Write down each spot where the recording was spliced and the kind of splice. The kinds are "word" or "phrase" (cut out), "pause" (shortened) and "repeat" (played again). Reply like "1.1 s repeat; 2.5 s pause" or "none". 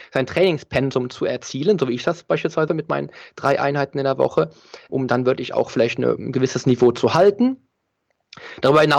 2.7 s word; 4.9 s word

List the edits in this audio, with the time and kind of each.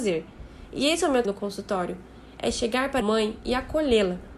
1.2 s word; 3.0 s word

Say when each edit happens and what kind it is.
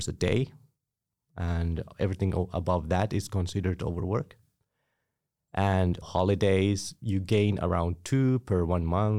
6.0 s word

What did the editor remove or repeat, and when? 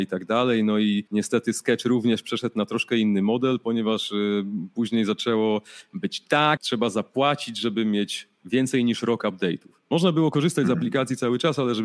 1.1 s pause; 6.6 s word

